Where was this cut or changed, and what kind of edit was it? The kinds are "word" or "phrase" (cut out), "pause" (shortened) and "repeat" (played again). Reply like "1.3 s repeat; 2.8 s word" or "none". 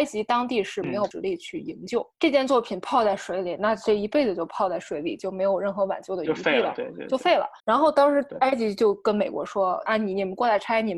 7.6 s pause